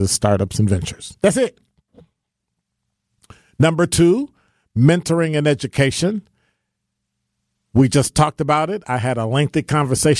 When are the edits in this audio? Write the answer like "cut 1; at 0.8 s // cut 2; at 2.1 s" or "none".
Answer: none